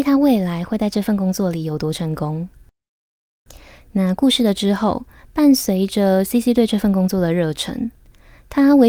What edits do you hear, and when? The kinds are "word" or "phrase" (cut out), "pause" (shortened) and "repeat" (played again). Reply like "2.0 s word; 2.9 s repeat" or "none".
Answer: none

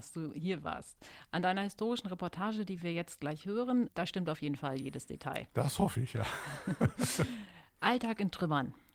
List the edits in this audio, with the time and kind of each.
none

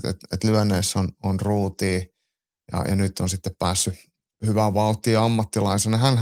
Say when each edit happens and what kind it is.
none

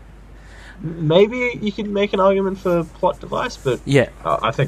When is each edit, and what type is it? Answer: none

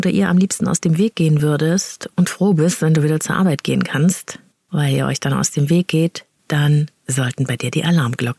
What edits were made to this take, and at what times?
none

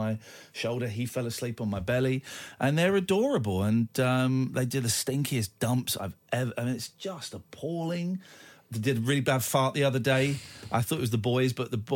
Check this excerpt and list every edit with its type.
none

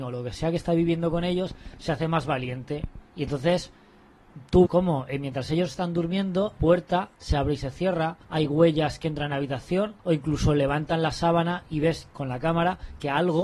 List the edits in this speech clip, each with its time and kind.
3.1 s pause; 4.6 s word; 6.6 s word; 7.1 s pause; 8.2 s pause; 10.0 s pause

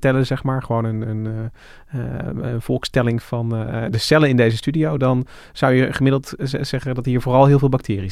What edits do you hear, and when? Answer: none

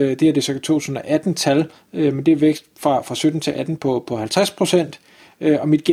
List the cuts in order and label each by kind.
none

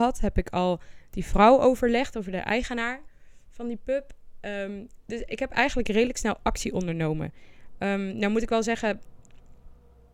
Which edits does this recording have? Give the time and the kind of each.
none

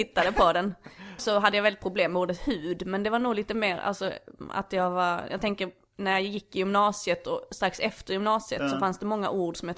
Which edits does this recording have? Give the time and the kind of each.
1.2 s phrase

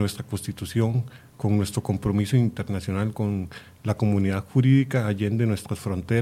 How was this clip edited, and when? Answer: none

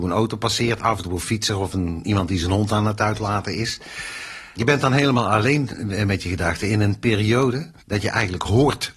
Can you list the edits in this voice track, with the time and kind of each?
7.8 s pause

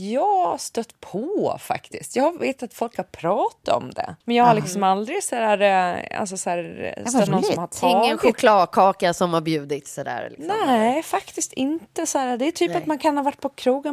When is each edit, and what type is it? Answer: 4.2 s pause; 7.3 s word

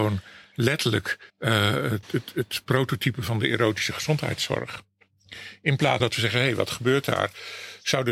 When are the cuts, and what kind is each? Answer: 1.3 s pause; 2.0 s word; 6.0 s word

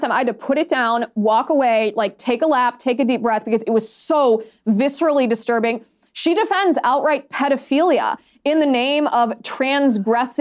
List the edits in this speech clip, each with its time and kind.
none

